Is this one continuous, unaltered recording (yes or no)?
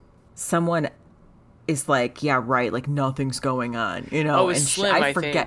yes